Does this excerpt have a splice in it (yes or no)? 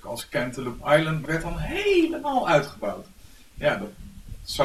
yes